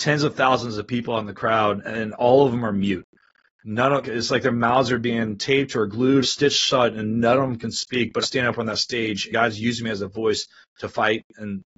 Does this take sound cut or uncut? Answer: cut